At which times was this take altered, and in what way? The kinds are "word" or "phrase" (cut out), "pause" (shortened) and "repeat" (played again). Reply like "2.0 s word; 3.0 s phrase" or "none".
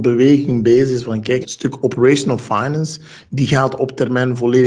1.4 s word